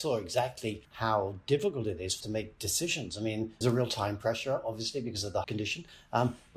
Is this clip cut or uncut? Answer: cut